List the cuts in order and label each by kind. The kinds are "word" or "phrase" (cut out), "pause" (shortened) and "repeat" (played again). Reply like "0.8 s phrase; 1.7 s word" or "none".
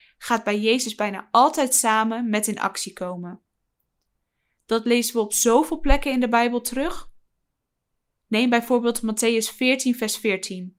none